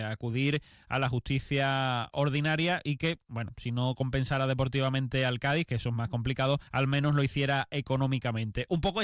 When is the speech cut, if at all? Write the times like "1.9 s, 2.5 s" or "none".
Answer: 6.7 s